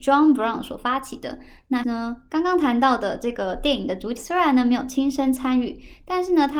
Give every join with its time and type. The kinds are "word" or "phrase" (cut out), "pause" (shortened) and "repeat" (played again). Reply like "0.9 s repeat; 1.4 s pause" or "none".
1.8 s word; 4.2 s word